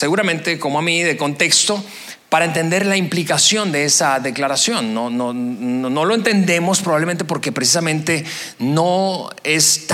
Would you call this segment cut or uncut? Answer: uncut